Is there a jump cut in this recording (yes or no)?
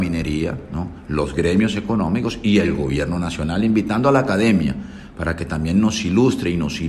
no